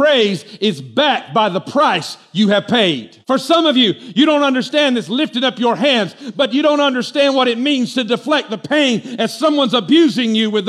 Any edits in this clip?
yes; 1 cut; at 3.2 s

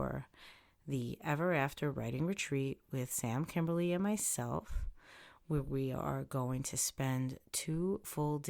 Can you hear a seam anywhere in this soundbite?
no; 0 cuts

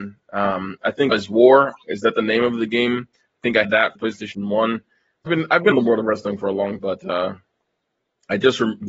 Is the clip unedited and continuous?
no; 6 cuts; at 1.1 s, 3.6 s, 4.0 s, 5.3 s, 5.7 s, 6.8 s

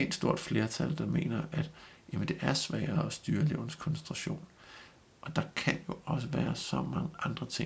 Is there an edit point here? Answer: no; 0 cuts

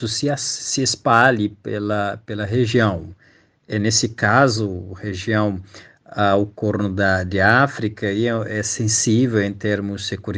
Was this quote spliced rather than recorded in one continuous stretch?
no; 0 cuts

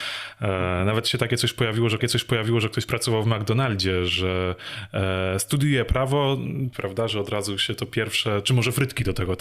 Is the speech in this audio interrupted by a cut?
yes; 2 cuts; at 2.0 s, 6.7 s

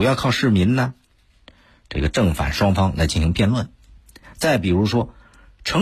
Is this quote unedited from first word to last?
yes; 0 cuts

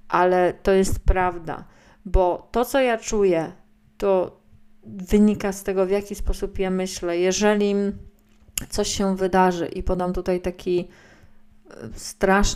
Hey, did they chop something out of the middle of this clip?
no; 0 cuts

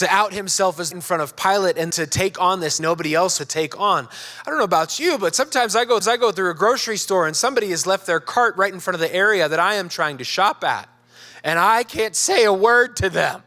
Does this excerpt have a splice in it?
yes; 5 cuts; at 0.9 s, 1.9 s, 2.8 s, 3.4 s, 6.0 s

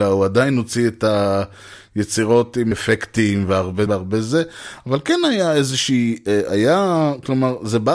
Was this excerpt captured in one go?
no; 2 cuts; at 2.7 s, 3.9 s

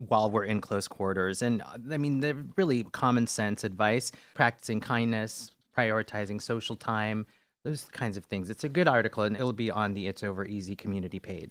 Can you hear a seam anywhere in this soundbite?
yes; 1 cut; at 4.3 s

